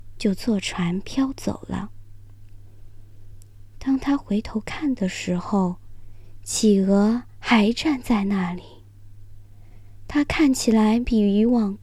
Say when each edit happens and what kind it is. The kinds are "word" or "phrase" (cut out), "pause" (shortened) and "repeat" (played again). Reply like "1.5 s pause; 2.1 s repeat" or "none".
7.3 s pause